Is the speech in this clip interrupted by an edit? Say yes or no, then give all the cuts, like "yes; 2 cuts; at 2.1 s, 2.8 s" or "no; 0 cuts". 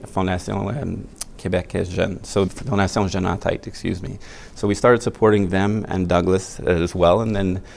yes; 2 cuts; at 1.4 s, 2.5 s